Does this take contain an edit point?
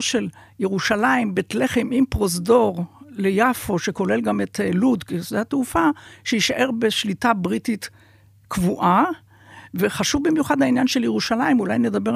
no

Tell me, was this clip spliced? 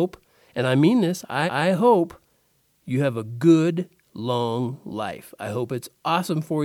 yes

